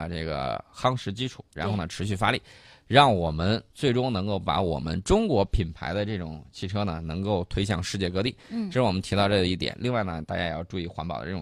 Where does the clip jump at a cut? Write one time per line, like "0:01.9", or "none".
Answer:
none